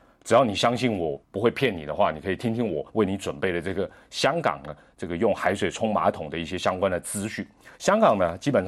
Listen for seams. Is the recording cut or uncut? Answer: cut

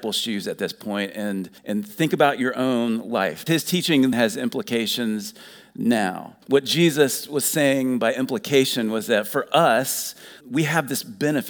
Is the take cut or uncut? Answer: cut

